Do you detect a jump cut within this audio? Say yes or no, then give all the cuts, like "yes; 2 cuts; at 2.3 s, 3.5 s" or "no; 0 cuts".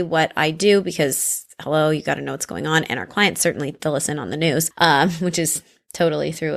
no; 0 cuts